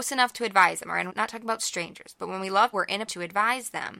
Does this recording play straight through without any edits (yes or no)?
no